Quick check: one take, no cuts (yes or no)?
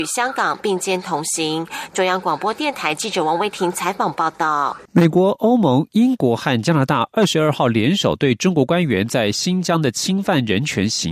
no